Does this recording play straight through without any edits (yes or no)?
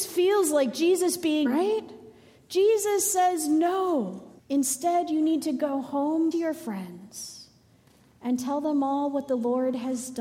no